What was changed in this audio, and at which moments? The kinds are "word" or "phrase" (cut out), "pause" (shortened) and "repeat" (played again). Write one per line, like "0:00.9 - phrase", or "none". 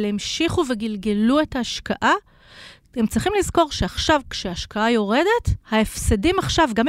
0:05.6 - pause